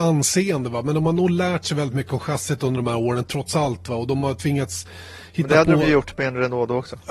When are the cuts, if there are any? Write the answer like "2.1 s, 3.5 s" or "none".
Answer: none